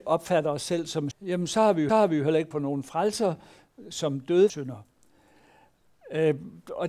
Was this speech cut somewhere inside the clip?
yes; 4 cuts; at 1.1 s, 1.9 s, 2.5 s, 4.5 s

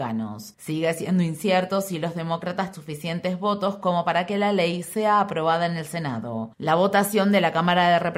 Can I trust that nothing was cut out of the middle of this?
no; 1 cut; at 2.7 s

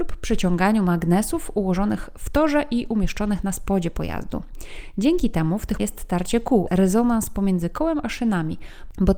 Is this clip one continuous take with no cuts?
no; 2 cuts; at 5.8 s, 6.7 s

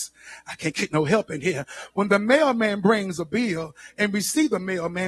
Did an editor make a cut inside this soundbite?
no; 0 cuts

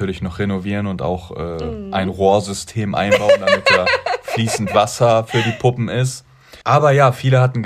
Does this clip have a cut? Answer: yes; 1 cut; at 6.6 s

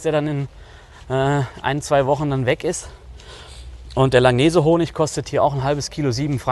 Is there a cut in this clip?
no; 0 cuts

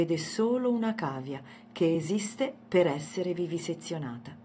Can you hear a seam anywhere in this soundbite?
no; 0 cuts

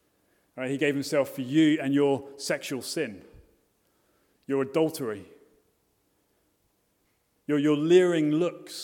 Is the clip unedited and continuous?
yes; 0 cuts

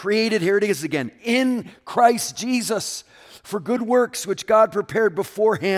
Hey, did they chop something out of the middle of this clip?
no; 0 cuts

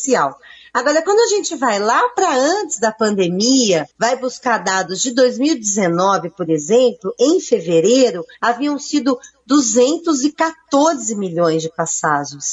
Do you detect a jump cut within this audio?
yes; 2 cuts; at 3.9 s, 8.3 s

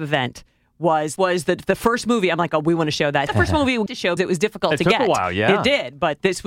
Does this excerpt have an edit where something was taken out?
yes; 4 cuts; at 1.2 s, 3.3 s, 3.9 s, 4.2 s

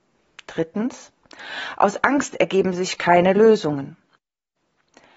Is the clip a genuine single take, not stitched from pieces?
yes; 0 cuts

